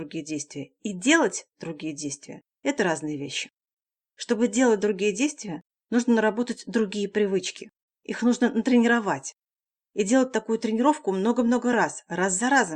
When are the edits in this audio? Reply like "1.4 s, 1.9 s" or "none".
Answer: none